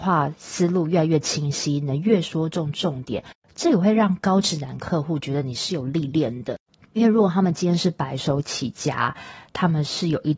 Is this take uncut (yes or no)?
yes